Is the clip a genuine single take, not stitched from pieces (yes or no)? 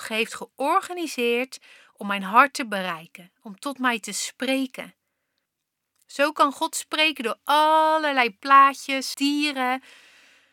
no